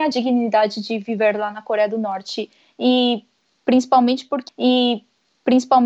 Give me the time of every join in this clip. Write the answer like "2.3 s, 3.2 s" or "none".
4.5 s